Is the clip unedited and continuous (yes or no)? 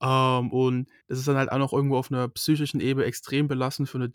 no